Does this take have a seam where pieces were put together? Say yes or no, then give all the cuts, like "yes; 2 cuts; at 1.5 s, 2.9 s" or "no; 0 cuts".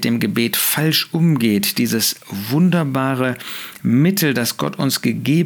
no; 0 cuts